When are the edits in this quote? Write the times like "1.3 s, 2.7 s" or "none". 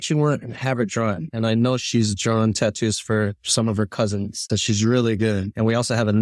4.5 s